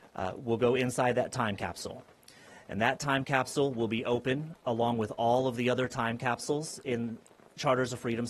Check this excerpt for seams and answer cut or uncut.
uncut